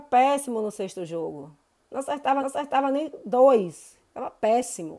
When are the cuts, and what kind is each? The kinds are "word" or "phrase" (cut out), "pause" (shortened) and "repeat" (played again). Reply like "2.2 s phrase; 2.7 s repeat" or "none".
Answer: 1.8 s pause; 2.4 s repeat